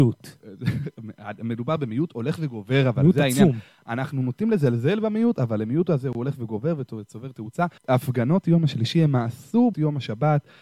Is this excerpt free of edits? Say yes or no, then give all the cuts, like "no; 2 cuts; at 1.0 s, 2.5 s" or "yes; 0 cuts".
no; 2 cuts; at 7.8 s, 9.7 s